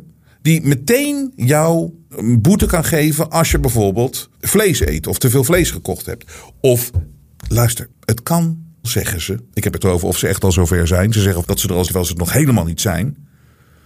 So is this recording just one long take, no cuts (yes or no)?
no